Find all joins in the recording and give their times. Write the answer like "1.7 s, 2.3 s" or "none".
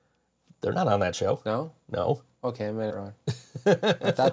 2.9 s